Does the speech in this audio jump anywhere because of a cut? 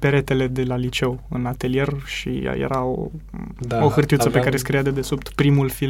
no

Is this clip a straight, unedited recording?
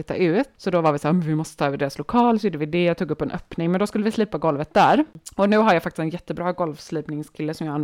yes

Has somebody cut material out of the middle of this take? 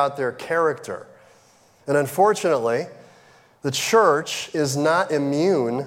no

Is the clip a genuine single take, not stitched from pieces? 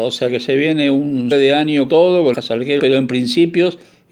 no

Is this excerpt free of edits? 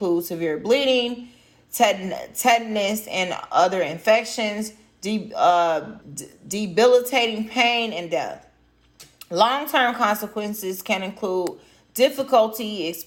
no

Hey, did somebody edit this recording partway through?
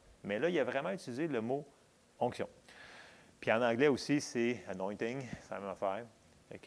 no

